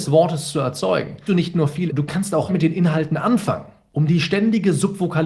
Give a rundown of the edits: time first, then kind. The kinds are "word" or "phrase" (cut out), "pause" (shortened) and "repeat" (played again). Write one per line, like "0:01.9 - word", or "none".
0:01.3 - word
0:01.9 - word
0:02.5 - word